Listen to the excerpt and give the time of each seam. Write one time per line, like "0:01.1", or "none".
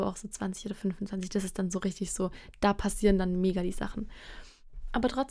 none